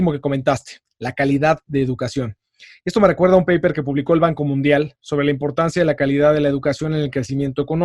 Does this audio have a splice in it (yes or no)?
no